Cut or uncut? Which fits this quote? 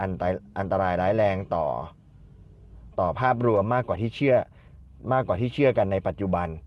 cut